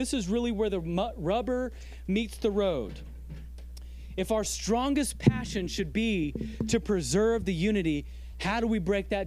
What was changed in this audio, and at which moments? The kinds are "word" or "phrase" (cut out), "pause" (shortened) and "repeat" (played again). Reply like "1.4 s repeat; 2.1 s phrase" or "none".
none